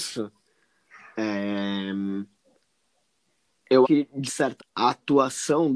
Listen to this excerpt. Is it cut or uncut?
cut